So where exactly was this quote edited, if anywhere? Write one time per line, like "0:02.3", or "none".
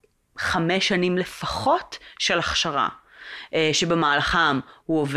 none